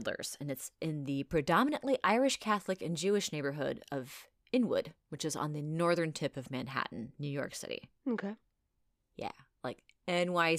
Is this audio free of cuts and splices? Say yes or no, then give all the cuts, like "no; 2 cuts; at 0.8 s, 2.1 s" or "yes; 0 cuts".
yes; 0 cuts